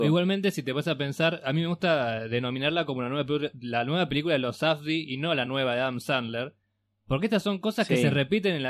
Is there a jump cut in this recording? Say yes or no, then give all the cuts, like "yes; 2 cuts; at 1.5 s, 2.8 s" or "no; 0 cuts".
no; 0 cuts